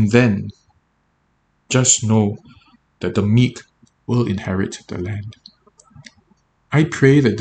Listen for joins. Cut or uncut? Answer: uncut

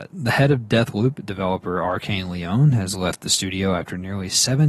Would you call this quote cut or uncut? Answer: uncut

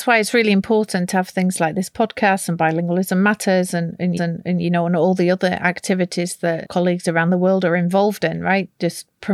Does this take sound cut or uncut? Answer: cut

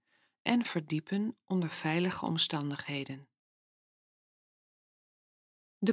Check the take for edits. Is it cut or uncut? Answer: uncut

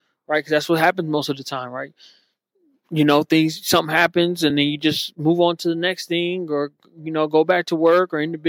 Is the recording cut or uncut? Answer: uncut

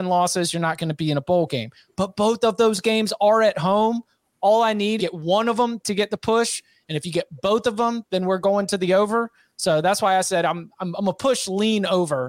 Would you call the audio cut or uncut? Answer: cut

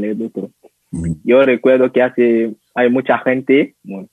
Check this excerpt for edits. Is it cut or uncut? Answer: uncut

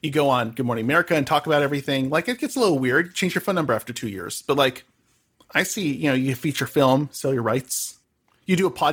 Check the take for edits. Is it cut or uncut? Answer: uncut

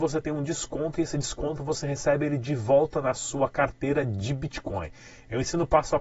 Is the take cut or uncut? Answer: uncut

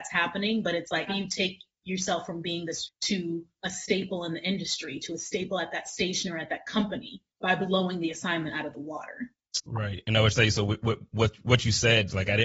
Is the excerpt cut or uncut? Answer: cut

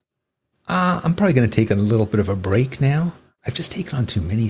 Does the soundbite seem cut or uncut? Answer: uncut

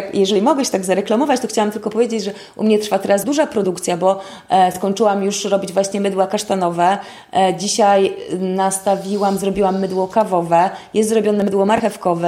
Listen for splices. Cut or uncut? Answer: cut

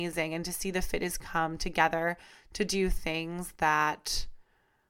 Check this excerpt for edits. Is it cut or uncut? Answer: cut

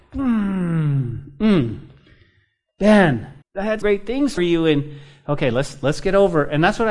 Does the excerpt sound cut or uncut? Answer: cut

